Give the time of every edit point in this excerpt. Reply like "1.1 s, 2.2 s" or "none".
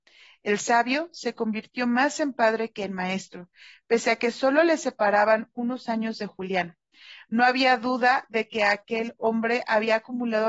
none

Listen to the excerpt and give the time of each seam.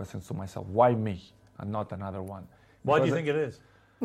none

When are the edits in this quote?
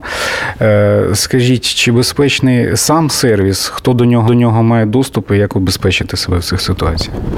4.3 s

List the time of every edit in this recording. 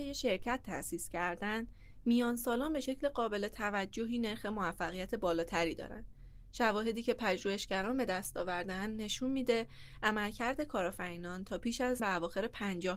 12.0 s

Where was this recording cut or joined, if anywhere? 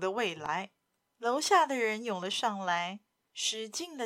none

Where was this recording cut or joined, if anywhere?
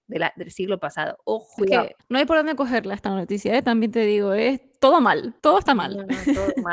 1.6 s, 2.0 s, 5.4 s

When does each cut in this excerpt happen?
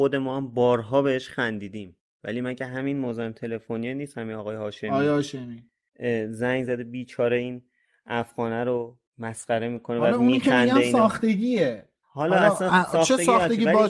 none

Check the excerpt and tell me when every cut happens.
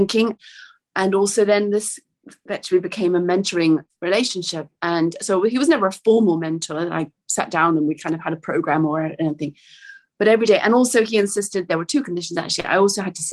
none

